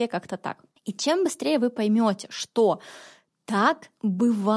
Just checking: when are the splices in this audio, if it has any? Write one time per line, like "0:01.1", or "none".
none